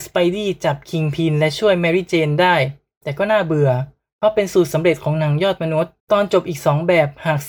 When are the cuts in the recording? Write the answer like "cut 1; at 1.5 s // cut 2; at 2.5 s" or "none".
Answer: cut 1; at 6.0 s